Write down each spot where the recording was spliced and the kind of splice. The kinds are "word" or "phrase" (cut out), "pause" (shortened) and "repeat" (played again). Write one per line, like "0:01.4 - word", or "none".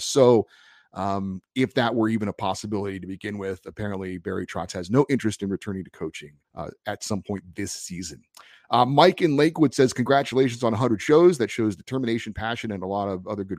0:06.4 - pause

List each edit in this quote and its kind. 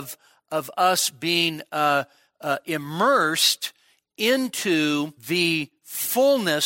0:05.2 - pause

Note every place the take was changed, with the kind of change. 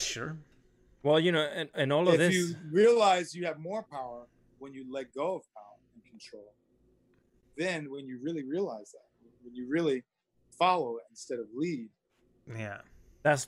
none

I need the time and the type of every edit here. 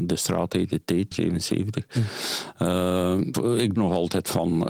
0:01.1 - word
0:03.3 - word
0:03.8 - word

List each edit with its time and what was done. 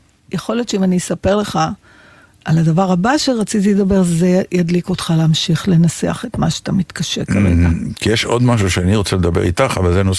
none

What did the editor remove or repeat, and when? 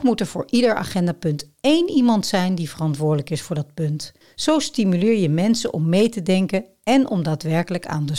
0:04.2 - pause

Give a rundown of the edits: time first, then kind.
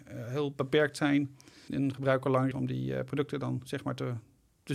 0:01.7 - word
0:02.5 - word

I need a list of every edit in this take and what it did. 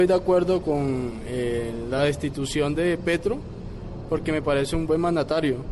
none

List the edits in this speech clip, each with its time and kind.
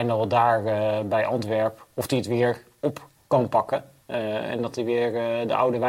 none

